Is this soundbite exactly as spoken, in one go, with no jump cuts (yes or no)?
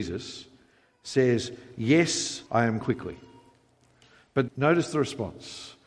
no